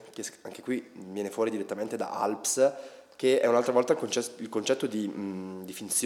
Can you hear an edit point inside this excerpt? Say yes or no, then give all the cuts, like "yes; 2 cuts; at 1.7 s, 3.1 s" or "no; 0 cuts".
no; 0 cuts